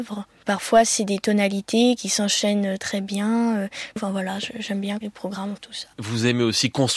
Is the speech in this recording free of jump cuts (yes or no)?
no